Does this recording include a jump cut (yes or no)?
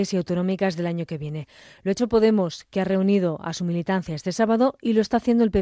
no